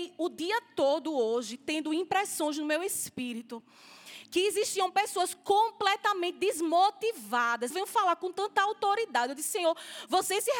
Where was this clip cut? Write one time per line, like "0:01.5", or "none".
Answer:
0:07.7